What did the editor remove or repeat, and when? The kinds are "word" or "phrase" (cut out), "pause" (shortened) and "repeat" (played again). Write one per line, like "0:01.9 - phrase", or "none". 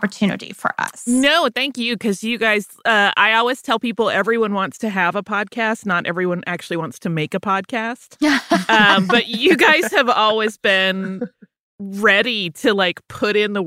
none